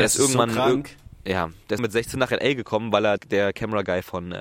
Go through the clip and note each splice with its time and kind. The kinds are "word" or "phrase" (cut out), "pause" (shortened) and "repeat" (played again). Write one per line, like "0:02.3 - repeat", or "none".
0:01.8 - word
0:03.2 - word